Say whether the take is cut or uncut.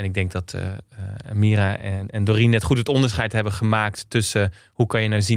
uncut